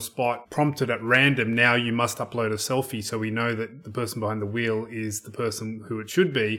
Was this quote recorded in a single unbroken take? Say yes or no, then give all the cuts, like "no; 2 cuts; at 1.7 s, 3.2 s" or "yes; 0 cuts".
yes; 0 cuts